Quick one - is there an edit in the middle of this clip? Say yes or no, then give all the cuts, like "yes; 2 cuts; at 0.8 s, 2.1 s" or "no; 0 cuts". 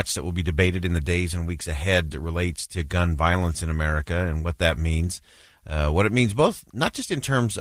yes; 1 cut; at 2.1 s